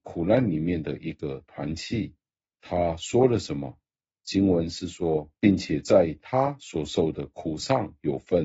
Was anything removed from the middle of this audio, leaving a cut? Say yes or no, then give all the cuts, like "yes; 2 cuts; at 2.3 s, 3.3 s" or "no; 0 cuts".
no; 0 cuts